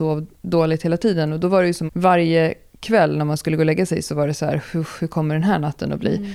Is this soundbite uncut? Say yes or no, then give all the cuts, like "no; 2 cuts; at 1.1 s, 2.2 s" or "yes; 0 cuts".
no; 1 cut; at 1.9 s